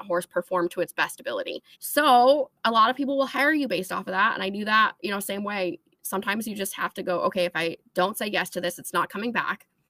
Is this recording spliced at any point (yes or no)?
yes